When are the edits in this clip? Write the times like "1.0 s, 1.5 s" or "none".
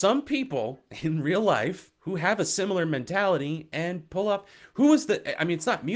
2.0 s